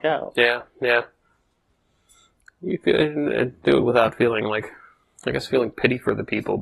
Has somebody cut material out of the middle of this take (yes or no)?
no